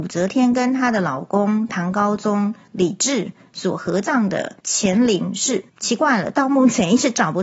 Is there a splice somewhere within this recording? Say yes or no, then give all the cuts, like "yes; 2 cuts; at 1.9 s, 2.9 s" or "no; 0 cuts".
yes; 2 cuts; at 4.6 s, 5.7 s